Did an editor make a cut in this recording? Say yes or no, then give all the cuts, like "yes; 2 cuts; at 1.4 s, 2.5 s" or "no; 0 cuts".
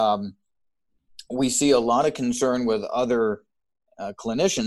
no; 0 cuts